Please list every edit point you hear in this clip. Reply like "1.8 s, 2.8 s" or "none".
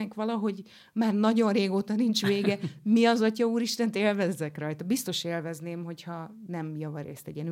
none